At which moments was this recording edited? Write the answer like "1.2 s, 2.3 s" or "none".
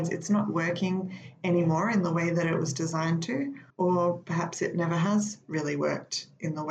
3.7 s